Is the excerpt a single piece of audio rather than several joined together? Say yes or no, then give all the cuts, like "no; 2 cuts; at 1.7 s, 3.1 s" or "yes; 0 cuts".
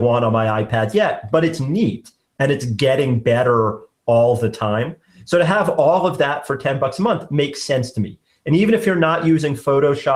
yes; 0 cuts